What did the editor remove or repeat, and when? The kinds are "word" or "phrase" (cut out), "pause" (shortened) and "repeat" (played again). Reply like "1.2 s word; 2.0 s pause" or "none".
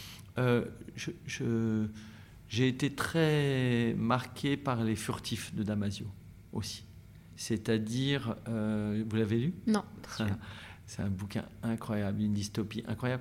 none